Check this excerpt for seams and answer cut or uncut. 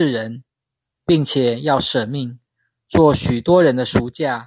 uncut